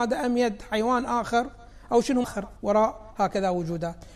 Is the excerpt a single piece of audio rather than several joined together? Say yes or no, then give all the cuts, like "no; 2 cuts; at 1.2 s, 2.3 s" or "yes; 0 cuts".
no; 2 cuts; at 2.2 s, 2.6 s